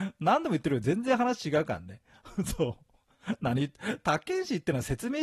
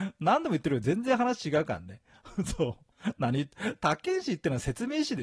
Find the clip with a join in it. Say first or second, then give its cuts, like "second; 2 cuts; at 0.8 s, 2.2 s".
second; 1 cut; at 2.9 s